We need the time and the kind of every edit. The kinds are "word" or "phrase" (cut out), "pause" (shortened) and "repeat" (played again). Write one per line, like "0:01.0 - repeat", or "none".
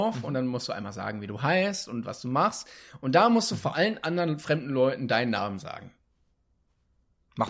none